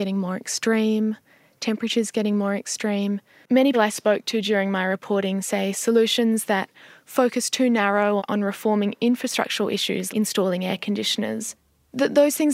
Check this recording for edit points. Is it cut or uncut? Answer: cut